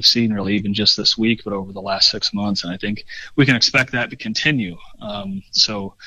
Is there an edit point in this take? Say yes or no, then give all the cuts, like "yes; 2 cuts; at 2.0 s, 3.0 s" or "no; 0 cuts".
no; 0 cuts